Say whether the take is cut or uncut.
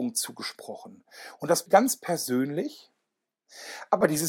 cut